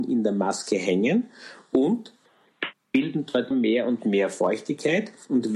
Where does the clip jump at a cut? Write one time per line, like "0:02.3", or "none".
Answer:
0:03.5

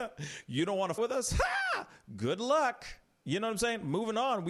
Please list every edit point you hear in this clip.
0:01.0

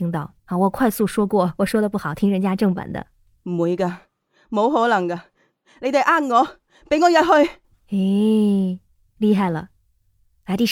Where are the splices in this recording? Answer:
none

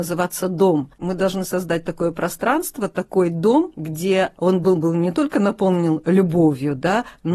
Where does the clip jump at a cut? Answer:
none

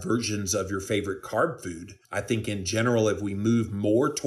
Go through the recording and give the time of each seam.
0:02.0

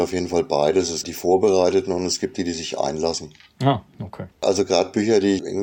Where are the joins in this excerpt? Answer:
0:01.0
0:04.3

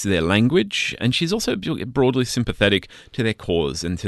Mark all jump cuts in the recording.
0:01.0

